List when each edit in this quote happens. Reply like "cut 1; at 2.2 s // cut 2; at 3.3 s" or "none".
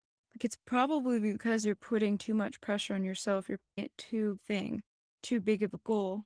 cut 1; at 3.8 s // cut 2; at 4.4 s